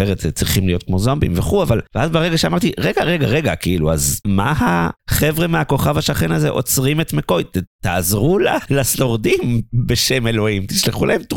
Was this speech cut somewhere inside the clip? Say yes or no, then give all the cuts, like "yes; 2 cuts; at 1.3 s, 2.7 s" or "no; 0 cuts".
no; 0 cuts